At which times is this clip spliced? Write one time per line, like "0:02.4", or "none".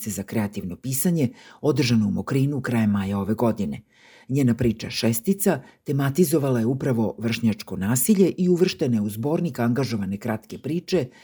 none